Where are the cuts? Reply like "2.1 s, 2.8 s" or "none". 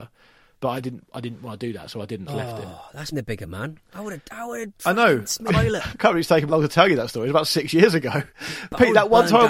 2.3 s, 3.1 s, 5.5 s, 6.5 s, 8.3 s